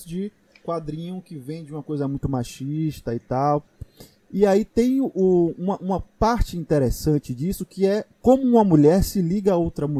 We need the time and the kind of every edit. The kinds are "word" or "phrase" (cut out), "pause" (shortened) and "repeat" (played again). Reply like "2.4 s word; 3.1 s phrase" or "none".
none